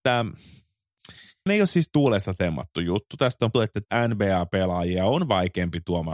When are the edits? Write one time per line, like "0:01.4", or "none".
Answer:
0:01.5
0:03.5
0:03.8